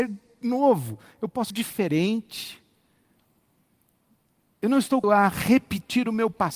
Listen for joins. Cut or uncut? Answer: cut